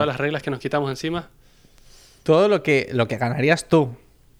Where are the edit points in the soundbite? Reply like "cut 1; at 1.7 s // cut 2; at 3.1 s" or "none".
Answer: none